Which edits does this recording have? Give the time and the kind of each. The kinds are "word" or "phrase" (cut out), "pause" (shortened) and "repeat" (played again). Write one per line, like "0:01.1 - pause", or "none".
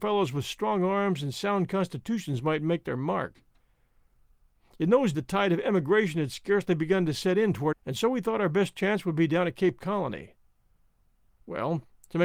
0:05.1 - word
0:07.7 - word